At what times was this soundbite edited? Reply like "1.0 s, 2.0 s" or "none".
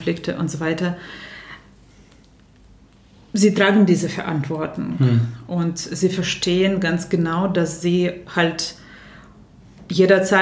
none